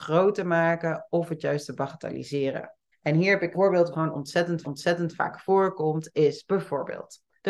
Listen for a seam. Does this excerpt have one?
yes; 4 cuts; at 2.9 s, 3.5 s, 3.9 s, 4.6 s

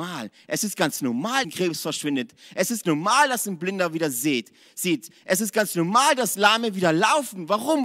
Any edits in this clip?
yes; 2 cuts; at 1.4 s, 2.8 s

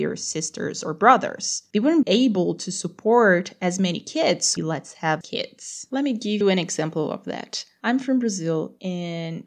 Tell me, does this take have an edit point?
yes; 4 cuts; at 2.0 s, 4.6 s, 5.2 s, 6.4 s

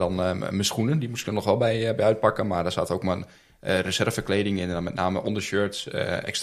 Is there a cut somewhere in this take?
no; 0 cuts

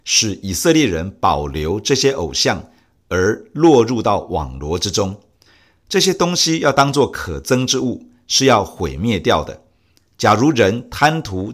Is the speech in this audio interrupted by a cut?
no; 0 cuts

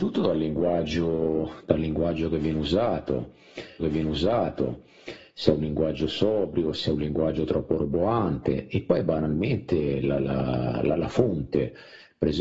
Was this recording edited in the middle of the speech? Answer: yes; 1 cut; at 3.8 s

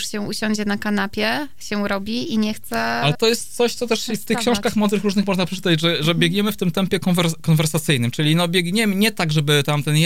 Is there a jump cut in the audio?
yes; 1 cut; at 3.1 s

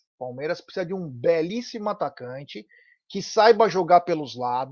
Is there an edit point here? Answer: no; 0 cuts

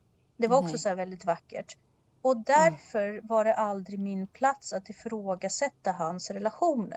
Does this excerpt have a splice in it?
no; 0 cuts

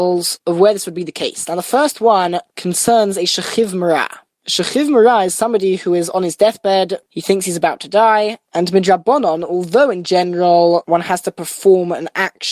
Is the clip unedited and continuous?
yes; 0 cuts

